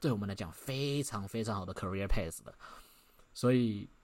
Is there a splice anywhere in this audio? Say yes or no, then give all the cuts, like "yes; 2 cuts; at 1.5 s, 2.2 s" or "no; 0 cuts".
no; 0 cuts